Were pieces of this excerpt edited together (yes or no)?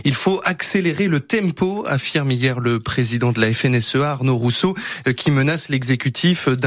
no